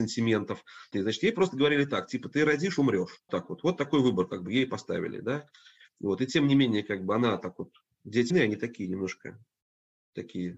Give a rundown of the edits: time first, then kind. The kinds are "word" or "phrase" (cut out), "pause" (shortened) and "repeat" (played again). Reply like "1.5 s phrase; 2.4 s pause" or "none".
0.9 s word; 3.3 s word; 8.3 s word